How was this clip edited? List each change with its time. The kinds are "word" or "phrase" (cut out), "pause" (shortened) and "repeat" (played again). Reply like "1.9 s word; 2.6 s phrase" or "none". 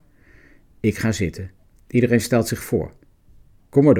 none